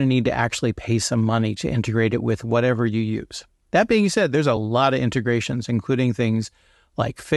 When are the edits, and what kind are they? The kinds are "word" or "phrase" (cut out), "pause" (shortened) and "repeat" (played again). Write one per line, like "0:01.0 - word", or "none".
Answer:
none